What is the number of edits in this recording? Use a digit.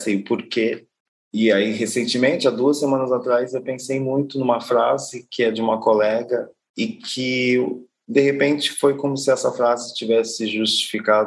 0